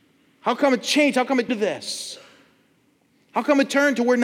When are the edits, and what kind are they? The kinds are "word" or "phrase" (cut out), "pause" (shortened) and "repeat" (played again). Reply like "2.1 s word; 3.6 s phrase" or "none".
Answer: 1.5 s word